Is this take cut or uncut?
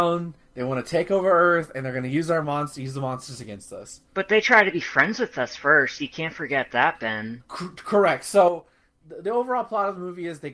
cut